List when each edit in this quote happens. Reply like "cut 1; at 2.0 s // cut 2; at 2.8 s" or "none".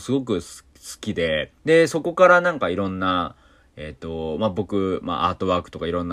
cut 1; at 1.6 s